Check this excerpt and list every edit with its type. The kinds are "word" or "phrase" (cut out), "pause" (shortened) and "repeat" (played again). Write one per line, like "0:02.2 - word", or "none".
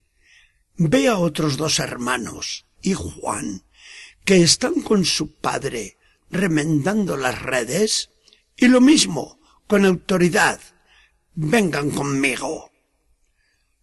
0:02.8 - word